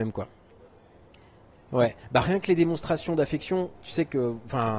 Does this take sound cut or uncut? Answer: uncut